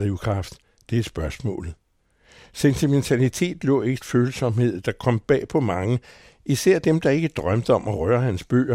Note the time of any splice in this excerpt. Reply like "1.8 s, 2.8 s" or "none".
4.0 s